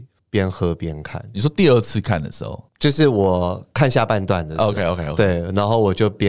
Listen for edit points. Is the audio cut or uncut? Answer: cut